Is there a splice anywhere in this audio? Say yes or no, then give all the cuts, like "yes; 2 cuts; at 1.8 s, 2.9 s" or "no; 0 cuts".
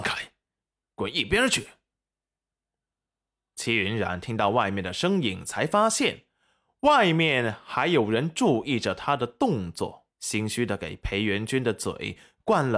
yes; 1 cut; at 10.1 s